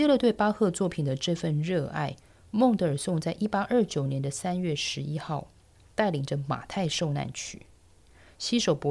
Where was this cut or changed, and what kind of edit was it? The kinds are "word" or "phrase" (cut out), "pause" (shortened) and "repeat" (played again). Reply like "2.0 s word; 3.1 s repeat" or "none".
none